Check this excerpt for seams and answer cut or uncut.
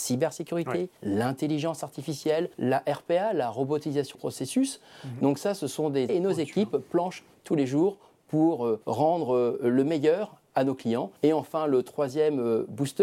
cut